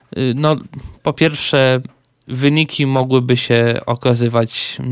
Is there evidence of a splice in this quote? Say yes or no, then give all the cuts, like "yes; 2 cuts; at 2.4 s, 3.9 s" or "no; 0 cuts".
no; 0 cuts